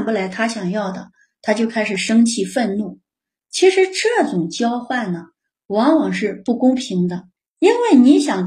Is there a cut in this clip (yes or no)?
yes